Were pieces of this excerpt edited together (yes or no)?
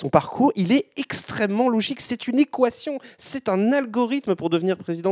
no